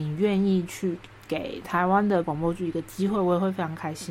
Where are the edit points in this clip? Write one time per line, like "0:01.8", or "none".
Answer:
0:02.2